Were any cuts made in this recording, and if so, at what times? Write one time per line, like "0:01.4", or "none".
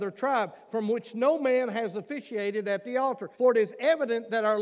0:03.3